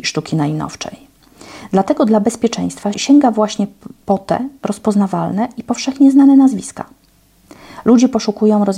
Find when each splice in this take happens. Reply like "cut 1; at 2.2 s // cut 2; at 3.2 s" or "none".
cut 1; at 2.9 s